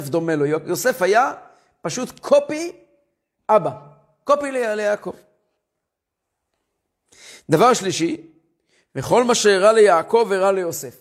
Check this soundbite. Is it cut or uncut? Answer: uncut